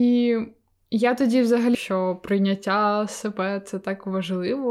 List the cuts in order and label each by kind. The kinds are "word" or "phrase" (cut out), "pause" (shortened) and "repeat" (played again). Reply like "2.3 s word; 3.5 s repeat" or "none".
1.7 s phrase